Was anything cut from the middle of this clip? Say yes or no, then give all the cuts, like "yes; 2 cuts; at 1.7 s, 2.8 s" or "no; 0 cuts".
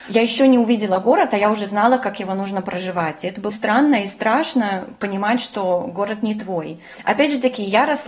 yes; 1 cut; at 3.5 s